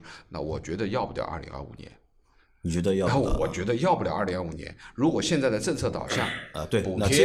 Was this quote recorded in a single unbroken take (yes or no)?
yes